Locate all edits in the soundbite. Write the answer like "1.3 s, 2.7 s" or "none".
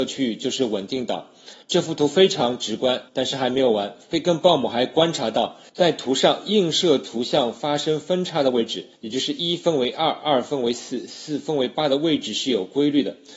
1.6 s, 3.1 s, 5.7 s, 8.9 s